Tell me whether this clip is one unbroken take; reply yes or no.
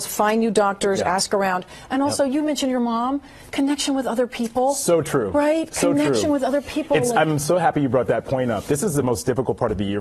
yes